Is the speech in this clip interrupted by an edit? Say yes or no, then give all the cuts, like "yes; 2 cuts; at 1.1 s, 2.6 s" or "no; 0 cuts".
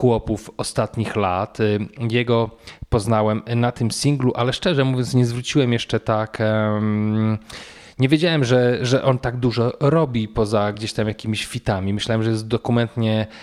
no; 0 cuts